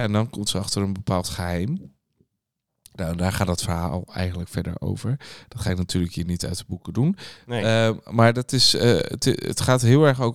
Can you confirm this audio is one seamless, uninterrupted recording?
yes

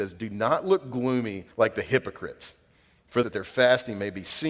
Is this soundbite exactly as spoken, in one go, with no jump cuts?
no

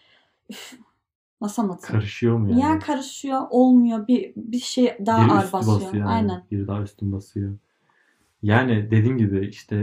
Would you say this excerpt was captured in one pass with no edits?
yes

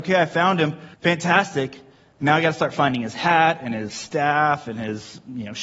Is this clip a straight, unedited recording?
no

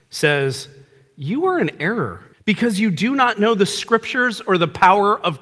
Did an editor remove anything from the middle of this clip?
yes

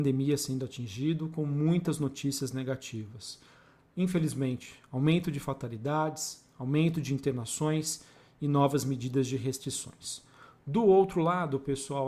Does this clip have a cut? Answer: no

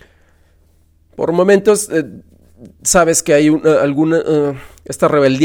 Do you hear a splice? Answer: no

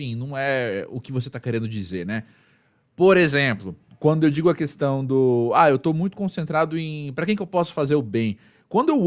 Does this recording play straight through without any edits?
yes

